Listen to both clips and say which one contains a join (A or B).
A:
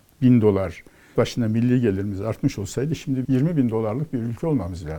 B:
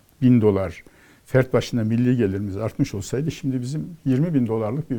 A